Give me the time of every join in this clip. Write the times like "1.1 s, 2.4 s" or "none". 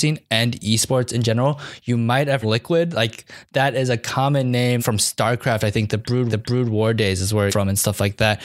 2.4 s, 4.8 s, 6.3 s, 7.5 s